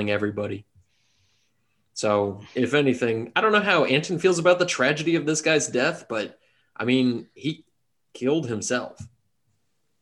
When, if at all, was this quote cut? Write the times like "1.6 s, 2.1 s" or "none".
none

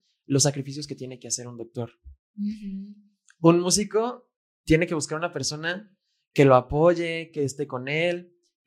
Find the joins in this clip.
none

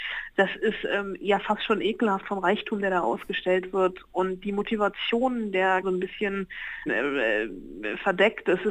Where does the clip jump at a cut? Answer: 5.8 s, 6.9 s

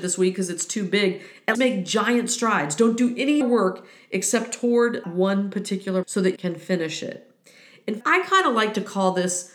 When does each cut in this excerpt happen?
1.5 s, 3.4 s, 5.0 s, 6.0 s, 6.4 s, 8.0 s

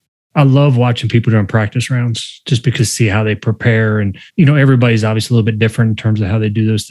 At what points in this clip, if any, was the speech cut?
2.8 s, 4.3 s

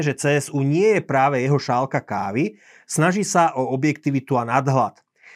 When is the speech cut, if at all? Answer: none

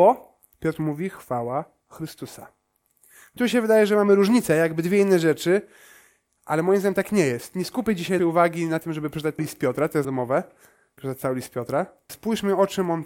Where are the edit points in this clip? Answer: 3.4 s, 8.2 s, 9.4 s, 10.0 s, 11.0 s, 12.1 s

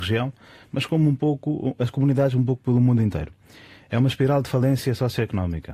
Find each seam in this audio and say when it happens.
none

